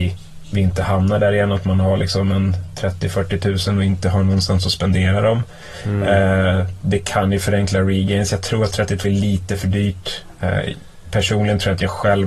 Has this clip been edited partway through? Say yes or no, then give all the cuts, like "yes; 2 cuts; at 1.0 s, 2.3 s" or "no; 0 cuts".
yes; 1 cut; at 9.0 s